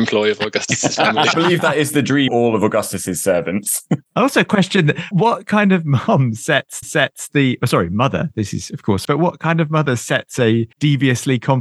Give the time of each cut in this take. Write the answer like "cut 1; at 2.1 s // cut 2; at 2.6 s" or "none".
cut 1; at 1.3 s // cut 2; at 2.3 s // cut 3; at 4.1 s // cut 4; at 5.1 s // cut 5; at 6.8 s // cut 6; at 9.0 s // cut 7; at 10.7 s

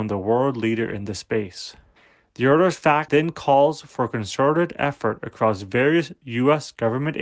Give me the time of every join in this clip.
cut 1; at 2.0 s // cut 2; at 3.1 s

